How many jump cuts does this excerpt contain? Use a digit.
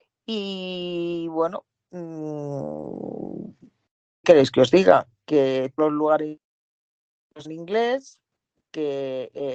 3